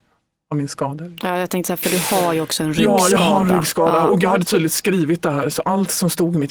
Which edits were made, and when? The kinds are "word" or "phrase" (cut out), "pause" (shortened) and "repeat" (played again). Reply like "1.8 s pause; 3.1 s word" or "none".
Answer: none